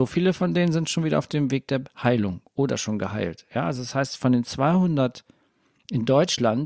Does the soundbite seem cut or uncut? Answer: uncut